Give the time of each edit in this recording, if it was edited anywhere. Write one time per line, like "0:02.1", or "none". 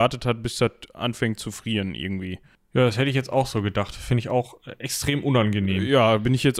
none